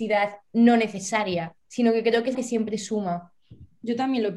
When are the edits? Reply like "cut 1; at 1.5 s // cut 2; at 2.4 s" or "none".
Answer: cut 1; at 1.6 s // cut 2; at 2.3 s